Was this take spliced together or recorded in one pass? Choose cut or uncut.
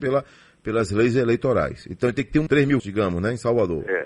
cut